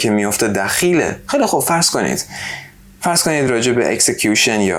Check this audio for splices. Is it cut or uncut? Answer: uncut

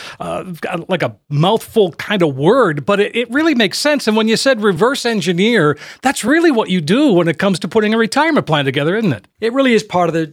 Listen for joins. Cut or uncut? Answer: uncut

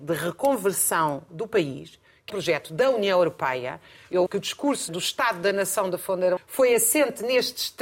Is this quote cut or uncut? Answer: cut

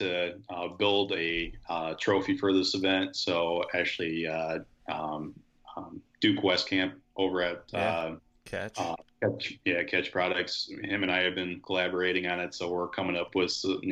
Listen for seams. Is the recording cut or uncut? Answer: uncut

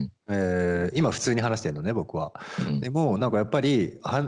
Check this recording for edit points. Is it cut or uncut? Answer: uncut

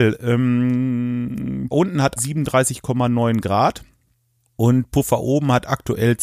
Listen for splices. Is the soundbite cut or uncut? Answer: cut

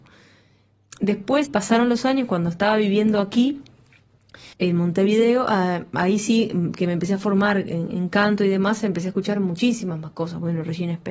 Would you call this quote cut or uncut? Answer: cut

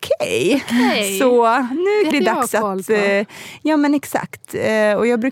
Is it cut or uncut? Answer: cut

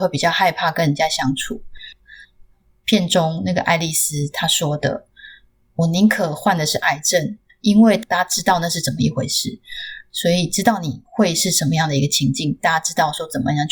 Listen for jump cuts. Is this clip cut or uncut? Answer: uncut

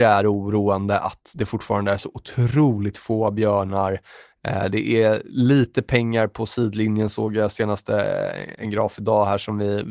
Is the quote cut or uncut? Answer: uncut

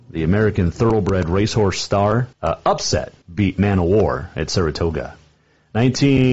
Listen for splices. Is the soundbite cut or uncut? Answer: cut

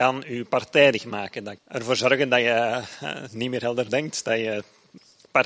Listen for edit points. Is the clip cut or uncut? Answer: cut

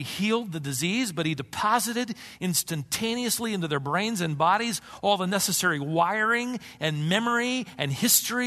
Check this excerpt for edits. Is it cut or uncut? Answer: uncut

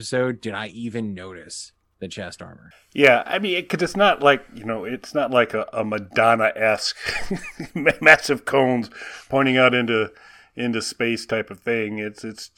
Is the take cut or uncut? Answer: uncut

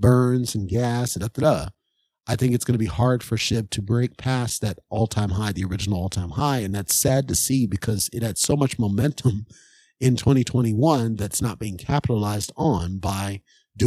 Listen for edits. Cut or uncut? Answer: uncut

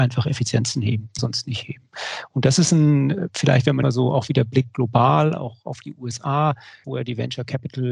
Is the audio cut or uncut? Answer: cut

